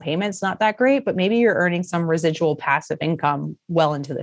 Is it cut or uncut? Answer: uncut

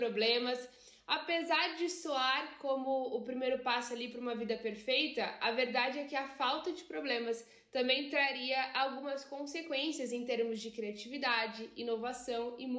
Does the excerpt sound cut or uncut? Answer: uncut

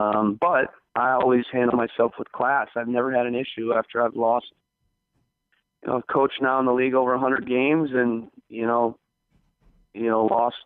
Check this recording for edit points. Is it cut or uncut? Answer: uncut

